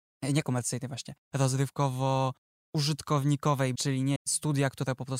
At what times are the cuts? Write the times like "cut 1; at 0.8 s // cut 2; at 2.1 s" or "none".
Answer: cut 1; at 3.7 s // cut 2; at 4.2 s